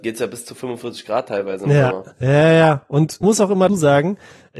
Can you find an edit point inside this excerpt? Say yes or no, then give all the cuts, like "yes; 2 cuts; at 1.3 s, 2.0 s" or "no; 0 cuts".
yes; 3 cuts; at 2.1 s, 3.2 s, 3.7 s